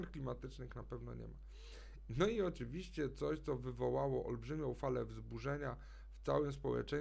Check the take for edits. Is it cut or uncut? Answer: uncut